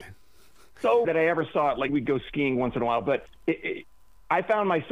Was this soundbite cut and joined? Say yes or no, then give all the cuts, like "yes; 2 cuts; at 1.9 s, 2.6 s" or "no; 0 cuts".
yes; 3 cuts; at 1.0 s, 1.9 s, 3.4 s